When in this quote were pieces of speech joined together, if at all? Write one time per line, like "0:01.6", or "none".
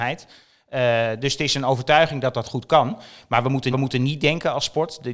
0:03.7

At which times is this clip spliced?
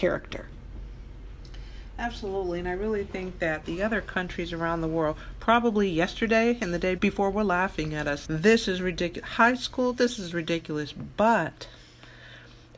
0:07.0
0:08.2

